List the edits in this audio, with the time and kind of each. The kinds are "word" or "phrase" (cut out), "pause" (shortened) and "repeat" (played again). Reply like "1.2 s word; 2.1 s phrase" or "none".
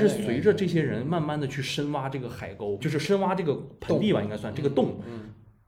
2.8 s word